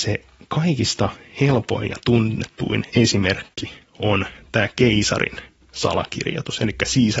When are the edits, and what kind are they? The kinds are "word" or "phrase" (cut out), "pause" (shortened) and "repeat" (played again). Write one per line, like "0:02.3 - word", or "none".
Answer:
none